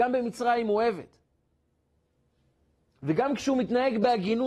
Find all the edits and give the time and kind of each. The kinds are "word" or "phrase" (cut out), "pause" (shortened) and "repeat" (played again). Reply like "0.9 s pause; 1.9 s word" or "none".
none